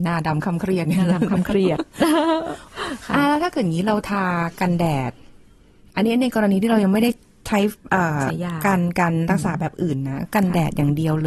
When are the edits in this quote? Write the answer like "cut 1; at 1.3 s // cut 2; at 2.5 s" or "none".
none